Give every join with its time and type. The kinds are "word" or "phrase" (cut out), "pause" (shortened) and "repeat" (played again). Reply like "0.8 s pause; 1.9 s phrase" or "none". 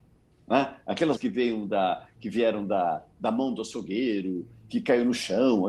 1.2 s word